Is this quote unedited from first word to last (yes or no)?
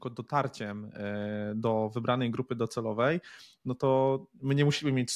yes